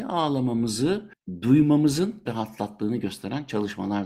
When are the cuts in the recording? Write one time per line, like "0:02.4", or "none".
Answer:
0:02.3